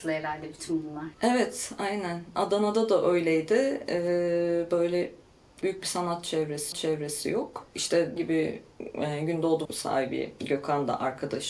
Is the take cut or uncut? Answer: cut